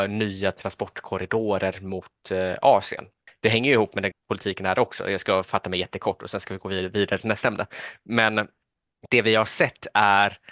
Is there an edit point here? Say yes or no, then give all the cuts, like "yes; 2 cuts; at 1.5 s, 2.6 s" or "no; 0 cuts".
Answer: yes; 1 cut; at 4.1 s